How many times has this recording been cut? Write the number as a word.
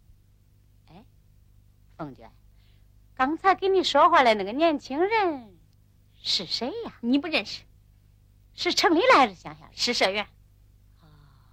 zero